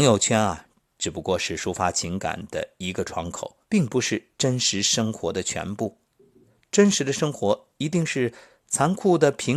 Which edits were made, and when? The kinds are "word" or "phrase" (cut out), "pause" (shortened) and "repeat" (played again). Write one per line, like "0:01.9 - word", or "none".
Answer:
0:03.6 - pause